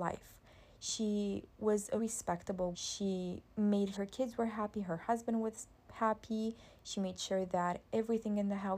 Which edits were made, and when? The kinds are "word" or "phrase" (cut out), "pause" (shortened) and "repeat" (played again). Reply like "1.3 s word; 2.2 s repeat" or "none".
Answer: 2.0 s word; 2.7 s word; 3.9 s phrase